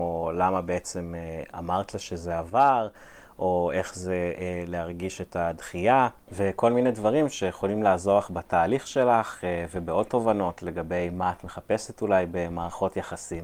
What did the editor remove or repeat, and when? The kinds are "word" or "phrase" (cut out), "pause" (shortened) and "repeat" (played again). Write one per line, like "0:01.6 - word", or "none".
none